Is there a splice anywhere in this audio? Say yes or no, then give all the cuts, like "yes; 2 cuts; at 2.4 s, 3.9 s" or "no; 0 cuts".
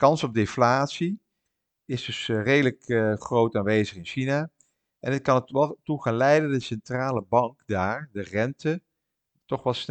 no; 0 cuts